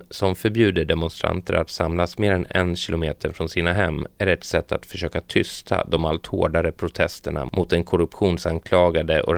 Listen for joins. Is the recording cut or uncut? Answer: uncut